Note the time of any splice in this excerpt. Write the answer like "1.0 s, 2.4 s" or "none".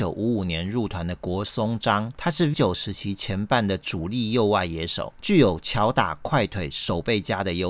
2.5 s